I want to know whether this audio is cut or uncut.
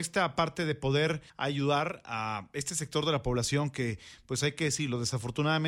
cut